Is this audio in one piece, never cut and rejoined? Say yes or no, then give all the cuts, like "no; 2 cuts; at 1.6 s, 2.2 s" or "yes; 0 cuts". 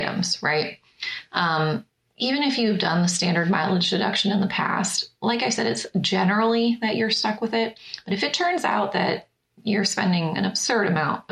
yes; 0 cuts